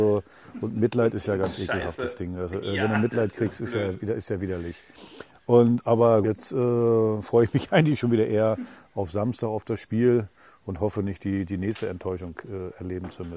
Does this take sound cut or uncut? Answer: cut